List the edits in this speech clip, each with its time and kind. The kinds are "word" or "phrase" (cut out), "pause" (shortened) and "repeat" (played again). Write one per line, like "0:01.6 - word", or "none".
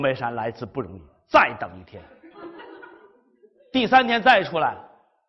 none